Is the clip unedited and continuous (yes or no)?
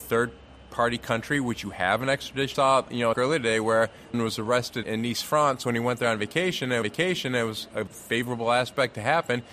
no